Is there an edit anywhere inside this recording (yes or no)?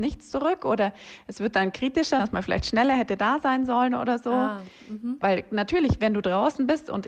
yes